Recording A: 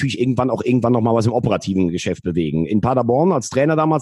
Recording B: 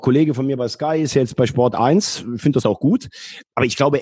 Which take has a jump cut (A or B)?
B